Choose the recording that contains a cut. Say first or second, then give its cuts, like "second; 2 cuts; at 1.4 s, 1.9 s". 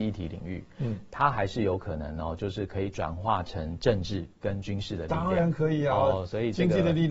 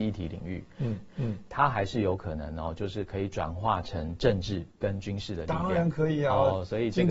second; 1 cut; at 1.1 s